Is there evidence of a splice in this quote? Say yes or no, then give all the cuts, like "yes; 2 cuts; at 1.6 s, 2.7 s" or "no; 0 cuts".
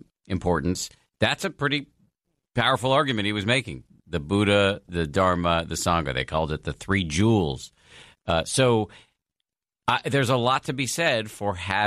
no; 0 cuts